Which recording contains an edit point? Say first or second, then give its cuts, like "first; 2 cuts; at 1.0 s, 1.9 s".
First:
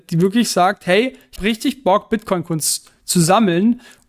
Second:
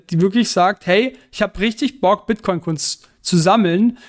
first; 1 cut; at 1.4 s